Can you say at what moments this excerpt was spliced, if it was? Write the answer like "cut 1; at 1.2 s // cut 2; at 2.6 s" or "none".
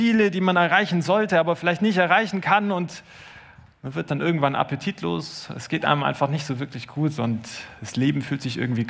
none